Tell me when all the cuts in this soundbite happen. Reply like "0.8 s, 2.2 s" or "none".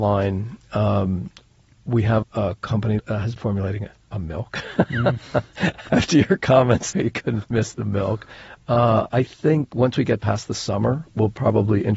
2.2 s, 3.0 s, 3.4 s, 5.9 s, 6.9 s, 7.4 s